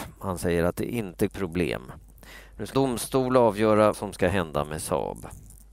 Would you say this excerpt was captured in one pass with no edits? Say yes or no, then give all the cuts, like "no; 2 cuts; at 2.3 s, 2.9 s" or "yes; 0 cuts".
no; 3 cuts; at 1.3 s, 2.7 s, 3.9 s